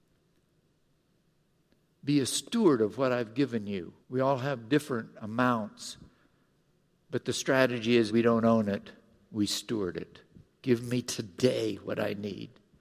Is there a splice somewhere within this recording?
yes; 2 cuts; at 4.0 s, 8.1 s

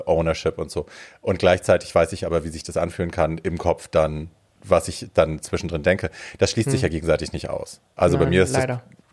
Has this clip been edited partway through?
no; 0 cuts

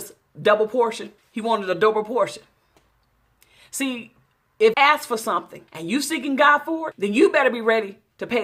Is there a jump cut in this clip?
yes; 4 cuts; at 1.2 s, 4.7 s, 5.7 s, 6.9 s

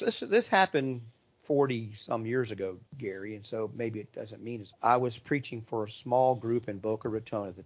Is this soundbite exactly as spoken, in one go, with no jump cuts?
no; 3 cuts; at 1.3 s, 2.9 s, 4.7 s

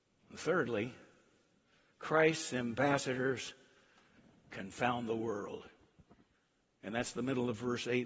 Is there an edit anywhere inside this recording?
no; 0 cuts

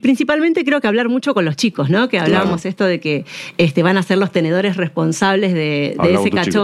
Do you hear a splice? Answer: no; 0 cuts

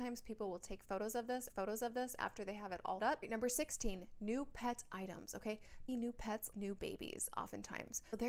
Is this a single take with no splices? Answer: no; 4 cuts; at 1.5 s, 3.0 s, 5.9 s, 6.5 s

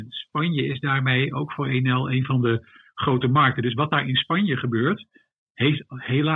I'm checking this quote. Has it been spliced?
no; 0 cuts

